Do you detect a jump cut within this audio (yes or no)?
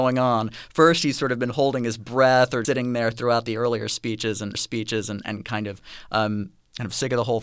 yes